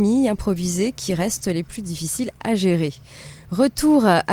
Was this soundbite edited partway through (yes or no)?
no